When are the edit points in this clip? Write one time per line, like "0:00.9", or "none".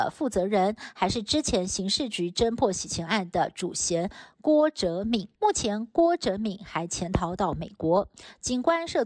0:05.3